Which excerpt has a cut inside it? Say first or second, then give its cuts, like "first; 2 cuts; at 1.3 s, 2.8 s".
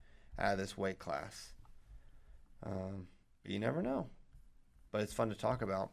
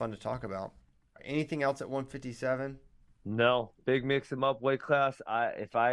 second; 2 cuts; at 1.0 s, 3.0 s